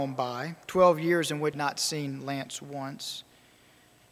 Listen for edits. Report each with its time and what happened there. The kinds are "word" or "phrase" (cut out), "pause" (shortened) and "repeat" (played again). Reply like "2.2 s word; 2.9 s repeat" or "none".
1.5 s word